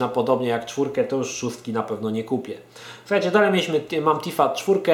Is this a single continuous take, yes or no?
yes